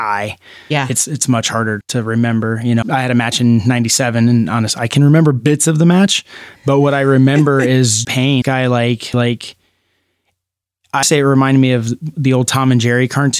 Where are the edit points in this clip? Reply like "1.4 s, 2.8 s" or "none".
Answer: 1.8 s, 2.8 s, 8.0 s, 8.4 s, 9.1 s, 11.0 s